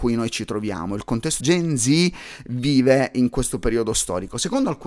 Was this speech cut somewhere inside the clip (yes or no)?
yes